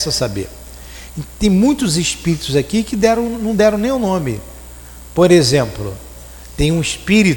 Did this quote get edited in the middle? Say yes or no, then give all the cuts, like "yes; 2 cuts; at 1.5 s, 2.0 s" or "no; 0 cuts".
no; 0 cuts